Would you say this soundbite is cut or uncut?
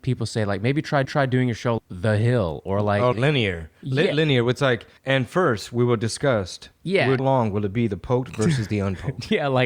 cut